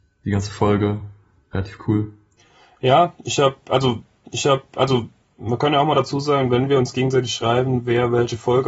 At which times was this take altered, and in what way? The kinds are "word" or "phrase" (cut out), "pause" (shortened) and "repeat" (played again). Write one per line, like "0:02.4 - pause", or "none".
0:04.2 - repeat

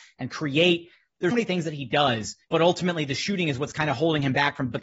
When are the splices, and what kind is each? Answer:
0:01.3 - word
0:02.4 - pause

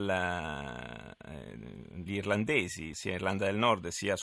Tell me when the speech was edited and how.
0:02.1 - word
0:02.9 - word

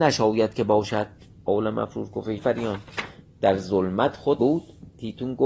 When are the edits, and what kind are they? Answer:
0:02.4 - word
0:04.4 - word

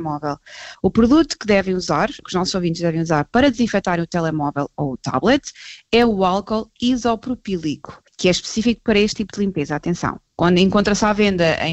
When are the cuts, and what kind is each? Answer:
0:02.2 - word
0:08.1 - pause

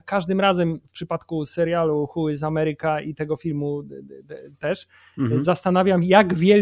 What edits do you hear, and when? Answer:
none

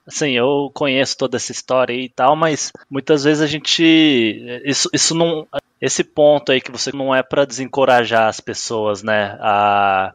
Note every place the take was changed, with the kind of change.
0:02.8 - pause
0:06.9 - word

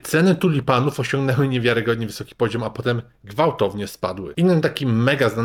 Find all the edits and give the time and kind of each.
none

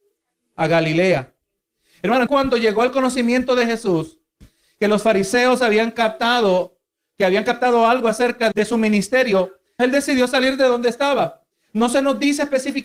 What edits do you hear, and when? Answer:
0:02.3 - word
0:08.5 - word
0:09.8 - word

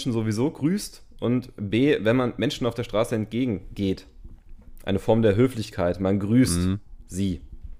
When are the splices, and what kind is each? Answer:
none

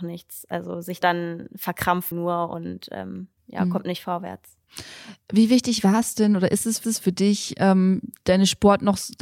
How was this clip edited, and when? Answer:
0:01.0 - phrase
0:02.1 - word
0:03.4 - pause
0:06.8 - repeat

